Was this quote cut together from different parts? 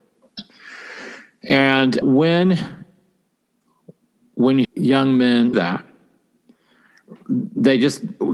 yes; 3 cuts; at 2.0 s, 4.6 s, 5.5 s

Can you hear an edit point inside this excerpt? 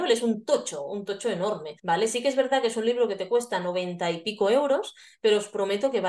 yes; 1 cut; at 1.8 s

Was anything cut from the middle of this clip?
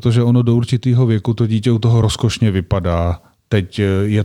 no; 0 cuts

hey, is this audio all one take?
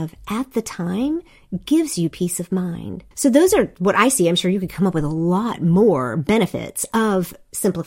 no; 1 cut; at 3.1 s

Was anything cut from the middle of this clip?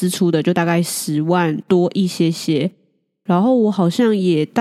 no; 0 cuts

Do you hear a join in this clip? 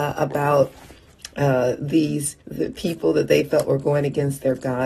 yes; 1 cut; at 2.4 s

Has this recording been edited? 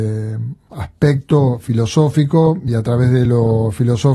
no; 0 cuts

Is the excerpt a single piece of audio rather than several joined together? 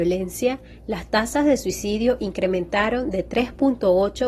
yes; 0 cuts

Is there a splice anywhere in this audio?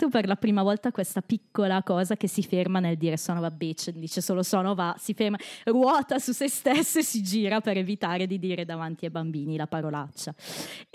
no; 0 cuts

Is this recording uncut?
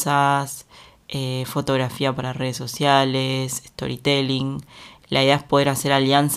yes; 0 cuts

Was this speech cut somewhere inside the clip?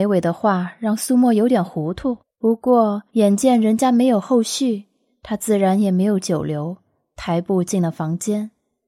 yes; 2 cuts; at 2.2 s, 3.1 s

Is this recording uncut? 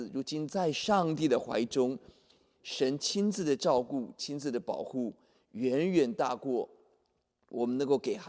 yes; 0 cuts

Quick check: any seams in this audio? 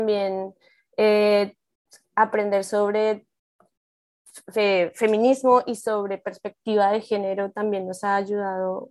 no; 0 cuts

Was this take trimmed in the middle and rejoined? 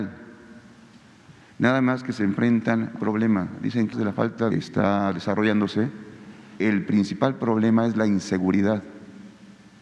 yes; 4 cuts; at 3.0 s, 3.9 s, 4.5 s, 6.6 s

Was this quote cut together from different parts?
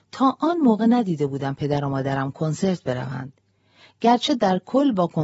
no; 0 cuts

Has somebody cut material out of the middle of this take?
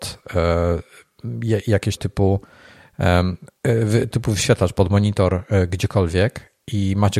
yes; 2 cuts; at 2.0 s, 4.1 s

